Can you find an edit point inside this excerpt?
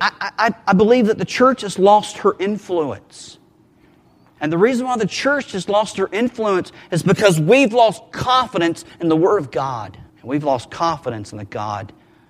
yes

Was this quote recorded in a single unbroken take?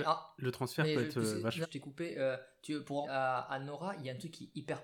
no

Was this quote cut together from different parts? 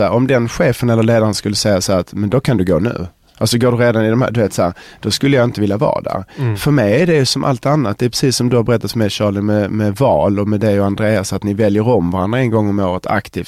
no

